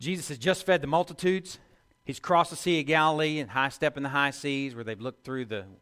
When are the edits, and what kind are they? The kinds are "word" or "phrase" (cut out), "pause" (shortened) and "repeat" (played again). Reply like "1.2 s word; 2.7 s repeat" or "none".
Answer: 1.9 s pause